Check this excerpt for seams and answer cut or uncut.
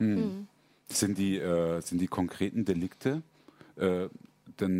uncut